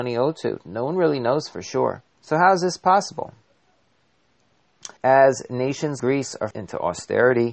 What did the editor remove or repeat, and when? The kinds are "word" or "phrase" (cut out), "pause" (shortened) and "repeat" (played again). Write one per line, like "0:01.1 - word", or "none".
0:02.1 - pause
0:05.0 - pause
0:06.0 - word
0:06.5 - word